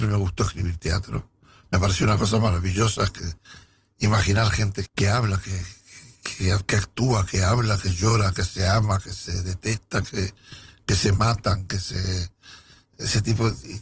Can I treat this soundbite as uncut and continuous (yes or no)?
no